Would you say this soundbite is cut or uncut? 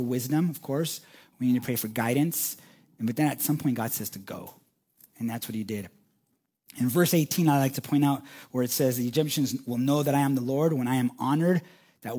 uncut